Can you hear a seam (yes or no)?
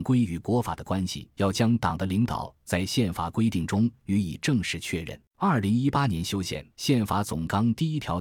yes